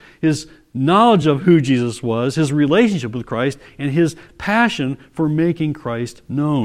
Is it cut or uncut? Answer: uncut